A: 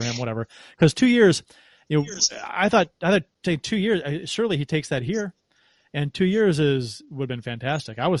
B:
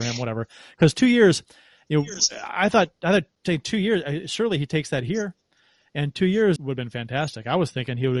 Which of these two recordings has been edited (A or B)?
B